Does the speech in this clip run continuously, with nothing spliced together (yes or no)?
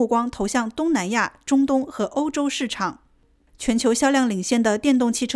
yes